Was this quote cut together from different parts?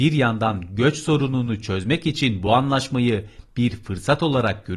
no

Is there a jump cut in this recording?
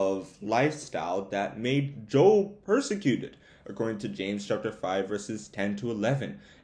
no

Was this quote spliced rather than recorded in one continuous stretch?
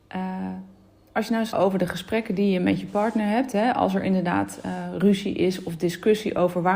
yes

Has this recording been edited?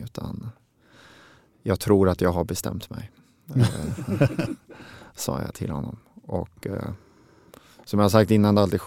no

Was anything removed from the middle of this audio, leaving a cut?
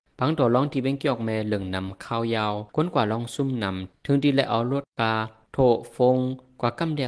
yes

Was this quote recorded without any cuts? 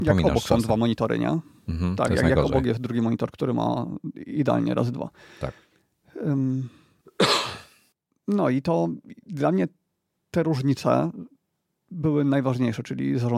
yes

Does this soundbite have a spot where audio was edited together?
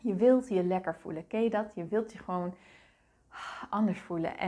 no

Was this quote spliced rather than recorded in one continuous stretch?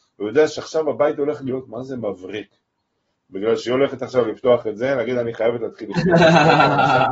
no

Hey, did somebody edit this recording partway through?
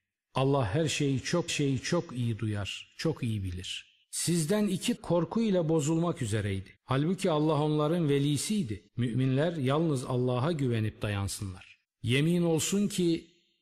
yes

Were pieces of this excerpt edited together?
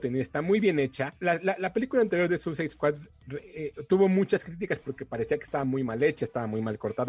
no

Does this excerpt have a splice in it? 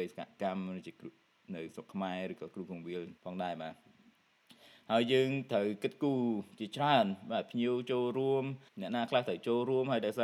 yes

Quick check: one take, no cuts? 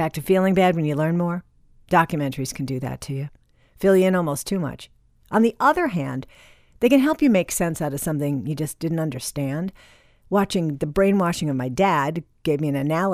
yes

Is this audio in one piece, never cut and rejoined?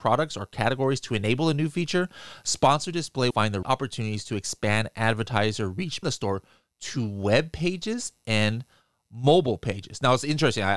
no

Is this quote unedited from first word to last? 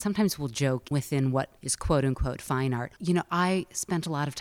no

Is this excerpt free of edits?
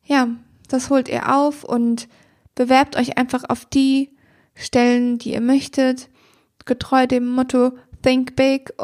yes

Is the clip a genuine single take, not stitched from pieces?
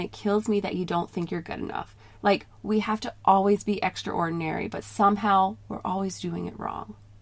yes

